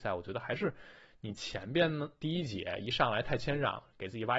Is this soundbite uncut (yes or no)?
yes